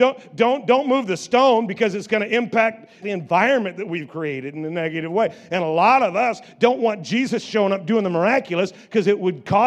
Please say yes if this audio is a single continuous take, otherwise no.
no